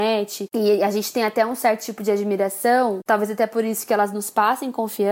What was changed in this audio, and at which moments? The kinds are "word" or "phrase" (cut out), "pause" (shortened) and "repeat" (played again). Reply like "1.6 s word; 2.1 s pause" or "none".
none